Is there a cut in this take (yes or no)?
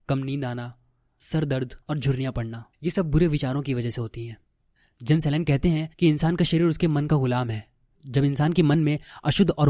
yes